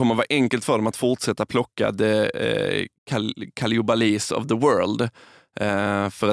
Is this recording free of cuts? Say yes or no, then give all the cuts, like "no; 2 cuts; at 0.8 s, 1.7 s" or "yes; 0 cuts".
no; 1 cut; at 2.9 s